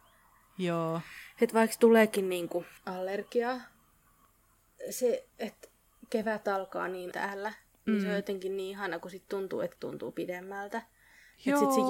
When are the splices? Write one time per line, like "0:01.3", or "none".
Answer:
0:02.8
0:05.3
0:07.1
0:09.8